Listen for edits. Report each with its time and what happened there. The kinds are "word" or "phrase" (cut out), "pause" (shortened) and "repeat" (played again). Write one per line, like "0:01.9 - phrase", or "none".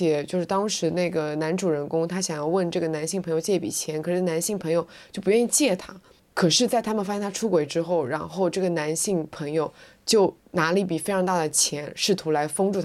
0:10.4 - pause